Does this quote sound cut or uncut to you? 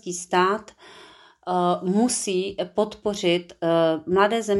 uncut